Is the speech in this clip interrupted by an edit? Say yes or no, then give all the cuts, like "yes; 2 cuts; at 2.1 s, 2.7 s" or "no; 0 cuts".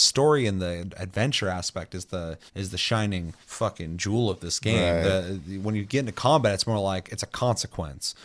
yes; 2 cuts; at 2.5 s, 3.4 s